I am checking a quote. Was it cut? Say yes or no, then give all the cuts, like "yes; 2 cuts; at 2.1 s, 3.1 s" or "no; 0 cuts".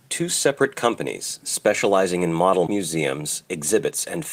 yes; 1 cut; at 2.7 s